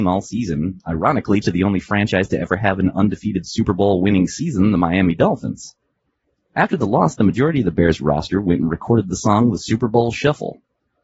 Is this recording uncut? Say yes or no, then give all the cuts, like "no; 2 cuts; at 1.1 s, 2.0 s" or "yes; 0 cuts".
yes; 0 cuts